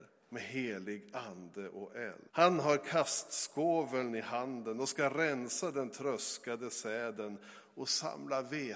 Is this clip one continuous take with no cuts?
no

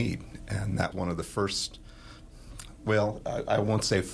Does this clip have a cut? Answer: yes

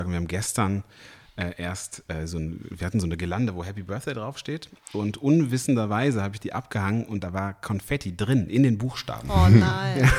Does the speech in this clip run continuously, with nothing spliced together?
yes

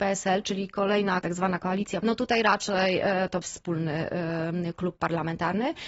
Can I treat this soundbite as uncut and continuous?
no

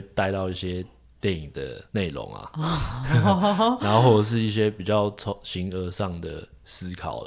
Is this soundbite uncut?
no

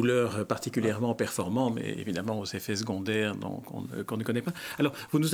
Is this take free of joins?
yes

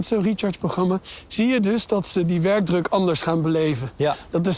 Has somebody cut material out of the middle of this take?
no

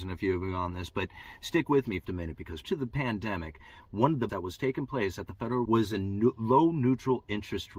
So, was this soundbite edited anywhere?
yes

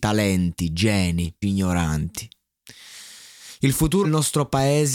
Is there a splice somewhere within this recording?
yes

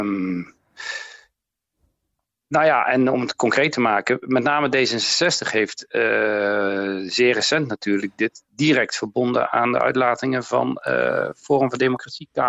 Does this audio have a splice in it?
no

